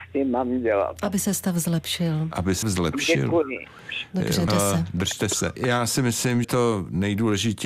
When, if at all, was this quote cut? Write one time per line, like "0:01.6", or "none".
0:02.6
0:04.5
0:05.6
0:06.4